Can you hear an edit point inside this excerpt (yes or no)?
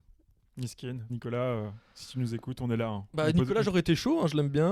yes